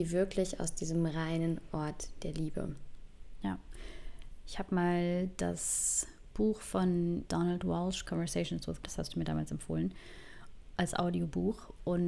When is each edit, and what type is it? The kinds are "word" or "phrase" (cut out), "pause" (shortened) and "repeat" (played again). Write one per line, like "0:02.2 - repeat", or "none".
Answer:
0:07.2 - word
0:08.0 - word
0:08.8 - word